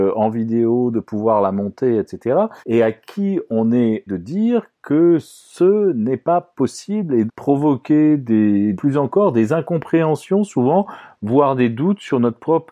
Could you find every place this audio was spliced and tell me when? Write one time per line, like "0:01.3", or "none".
0:02.6
0:04.1
0:07.3
0:08.7